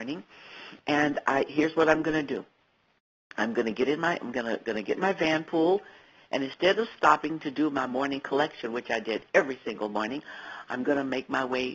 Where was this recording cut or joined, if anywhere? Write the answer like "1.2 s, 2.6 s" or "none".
none